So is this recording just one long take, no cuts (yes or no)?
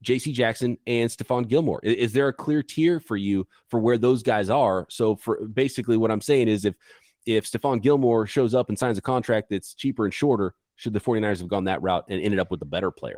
yes